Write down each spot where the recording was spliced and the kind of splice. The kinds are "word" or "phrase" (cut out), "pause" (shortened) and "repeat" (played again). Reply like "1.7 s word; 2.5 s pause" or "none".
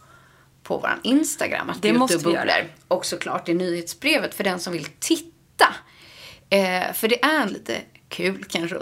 7.5 s word